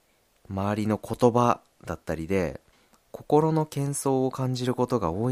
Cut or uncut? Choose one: cut